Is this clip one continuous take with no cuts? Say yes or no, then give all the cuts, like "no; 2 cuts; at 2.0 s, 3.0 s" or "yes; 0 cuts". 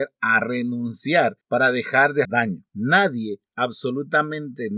no; 1 cut; at 2.2 s